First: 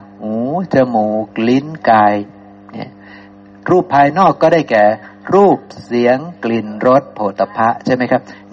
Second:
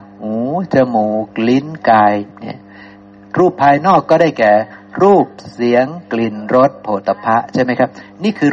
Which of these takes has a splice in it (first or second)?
second